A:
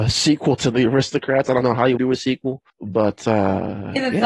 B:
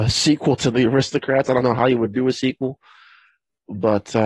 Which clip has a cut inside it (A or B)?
A